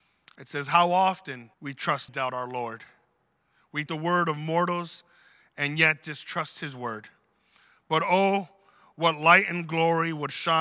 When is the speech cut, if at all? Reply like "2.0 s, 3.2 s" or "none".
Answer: 1.5 s, 2.1 s, 3.9 s